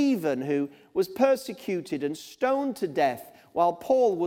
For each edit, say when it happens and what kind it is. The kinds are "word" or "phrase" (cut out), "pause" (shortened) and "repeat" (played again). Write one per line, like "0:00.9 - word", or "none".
none